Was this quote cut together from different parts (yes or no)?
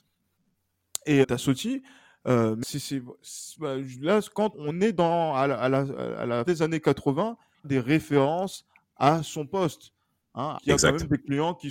yes